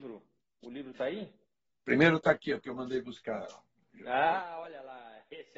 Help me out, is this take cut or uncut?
uncut